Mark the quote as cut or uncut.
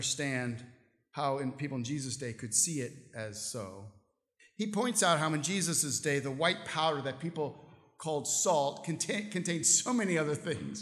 uncut